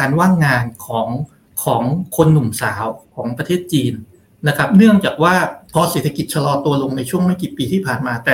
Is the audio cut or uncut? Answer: cut